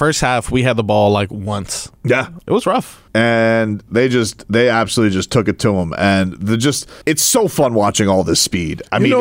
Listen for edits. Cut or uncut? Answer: cut